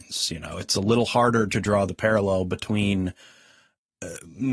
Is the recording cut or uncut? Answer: uncut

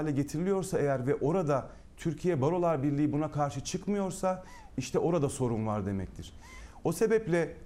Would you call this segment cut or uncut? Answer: uncut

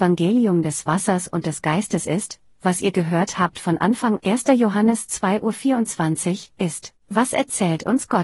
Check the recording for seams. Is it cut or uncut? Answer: cut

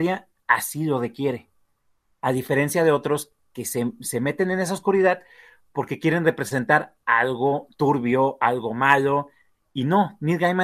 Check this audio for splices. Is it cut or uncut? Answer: uncut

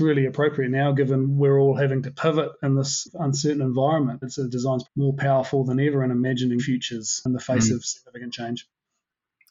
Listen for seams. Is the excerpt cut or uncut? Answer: cut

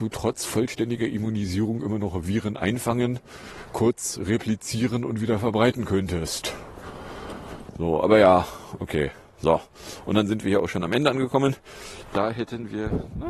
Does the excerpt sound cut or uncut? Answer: uncut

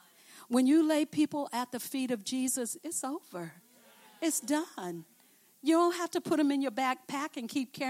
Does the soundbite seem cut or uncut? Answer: uncut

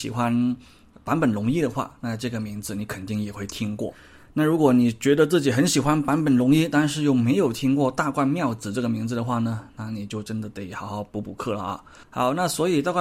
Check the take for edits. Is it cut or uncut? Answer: uncut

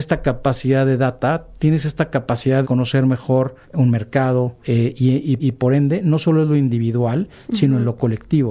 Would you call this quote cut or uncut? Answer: cut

